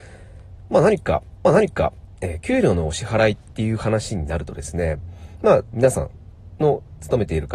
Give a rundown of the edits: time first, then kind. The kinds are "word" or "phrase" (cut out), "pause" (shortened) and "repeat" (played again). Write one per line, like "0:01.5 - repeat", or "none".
0:01.4 - repeat
0:05.7 - word